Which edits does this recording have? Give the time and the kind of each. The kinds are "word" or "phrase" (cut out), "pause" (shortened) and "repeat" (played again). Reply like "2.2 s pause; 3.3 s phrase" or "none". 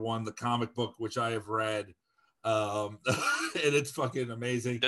none